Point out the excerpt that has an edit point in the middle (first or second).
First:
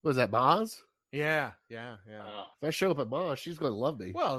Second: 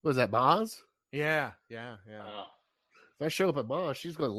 first